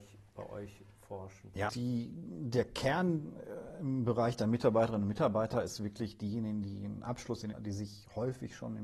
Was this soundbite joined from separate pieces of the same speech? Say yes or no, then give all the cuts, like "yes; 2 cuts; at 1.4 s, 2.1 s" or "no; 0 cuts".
yes; 2 cuts; at 1.7 s, 7.5 s